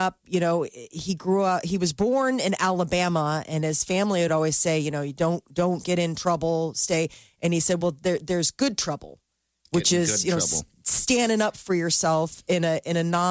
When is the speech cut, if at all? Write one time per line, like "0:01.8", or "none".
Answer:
none